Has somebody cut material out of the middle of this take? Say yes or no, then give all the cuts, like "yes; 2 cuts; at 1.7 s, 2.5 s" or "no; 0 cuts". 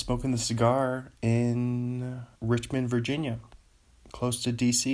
yes; 1 cut; at 2.3 s